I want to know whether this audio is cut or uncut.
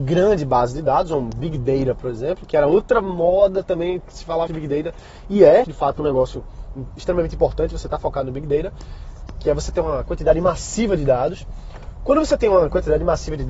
cut